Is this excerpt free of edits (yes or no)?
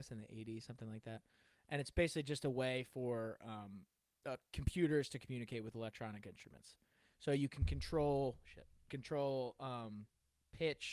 no